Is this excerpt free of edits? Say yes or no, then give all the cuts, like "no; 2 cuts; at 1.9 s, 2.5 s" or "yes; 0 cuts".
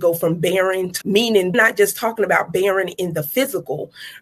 no; 2 cuts; at 1.0 s, 1.5 s